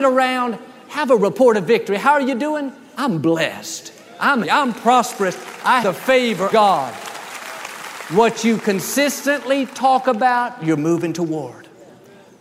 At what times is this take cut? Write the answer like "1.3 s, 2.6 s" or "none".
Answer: 4.4 s, 5.8 s, 6.5 s